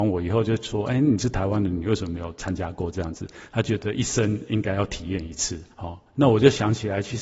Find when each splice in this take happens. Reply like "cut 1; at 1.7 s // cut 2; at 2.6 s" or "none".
cut 1; at 5.7 s